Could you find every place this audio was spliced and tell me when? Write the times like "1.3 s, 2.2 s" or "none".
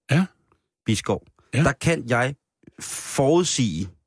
none